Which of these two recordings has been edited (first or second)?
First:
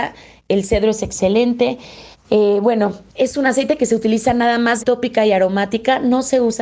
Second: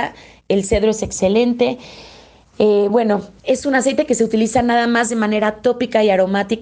first